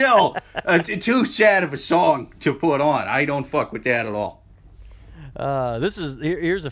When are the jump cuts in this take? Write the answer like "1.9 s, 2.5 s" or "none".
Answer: none